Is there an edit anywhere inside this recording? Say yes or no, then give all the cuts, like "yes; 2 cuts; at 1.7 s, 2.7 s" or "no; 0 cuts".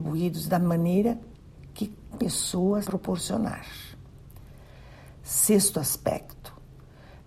yes; 2 cuts; at 2.1 s, 2.8 s